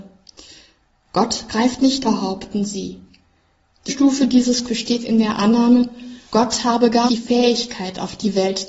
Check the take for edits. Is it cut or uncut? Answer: cut